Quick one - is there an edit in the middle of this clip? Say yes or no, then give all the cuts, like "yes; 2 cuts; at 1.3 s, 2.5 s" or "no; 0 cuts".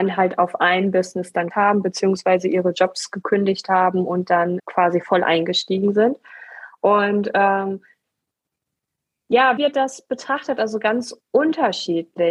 yes; 3 cuts; at 1.5 s, 4.6 s, 9.6 s